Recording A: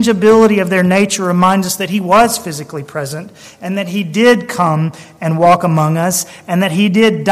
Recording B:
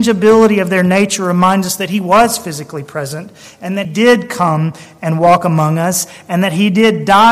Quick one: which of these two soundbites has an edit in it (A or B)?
B